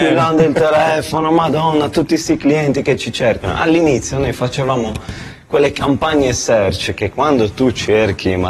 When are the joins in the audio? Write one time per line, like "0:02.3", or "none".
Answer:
none